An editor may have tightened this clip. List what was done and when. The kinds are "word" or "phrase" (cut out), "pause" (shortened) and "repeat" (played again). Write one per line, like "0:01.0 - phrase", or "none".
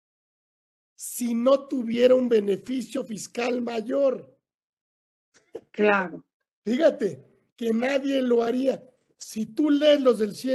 none